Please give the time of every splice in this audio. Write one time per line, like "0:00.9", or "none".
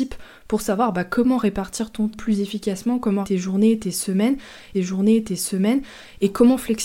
0:02.1
0:03.2
0:04.7